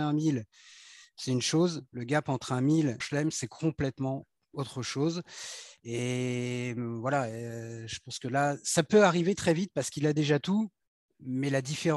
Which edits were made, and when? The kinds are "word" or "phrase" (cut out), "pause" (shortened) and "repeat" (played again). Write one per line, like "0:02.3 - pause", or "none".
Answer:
0:03.0 - phrase